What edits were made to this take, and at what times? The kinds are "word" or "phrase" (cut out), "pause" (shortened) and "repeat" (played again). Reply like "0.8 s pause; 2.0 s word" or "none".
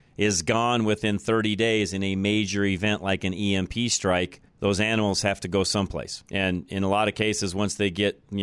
4.5 s pause; 6.3 s pause